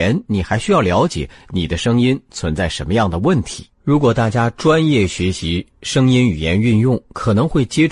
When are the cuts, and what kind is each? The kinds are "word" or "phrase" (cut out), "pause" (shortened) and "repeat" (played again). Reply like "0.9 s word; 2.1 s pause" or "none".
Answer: 3.7 s pause